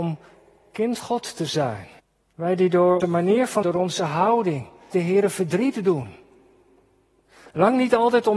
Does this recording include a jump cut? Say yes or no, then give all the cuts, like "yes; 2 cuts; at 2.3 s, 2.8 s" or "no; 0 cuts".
yes; 5 cuts; at 1.0 s, 2.0 s, 3.0 s, 3.6 s, 4.9 s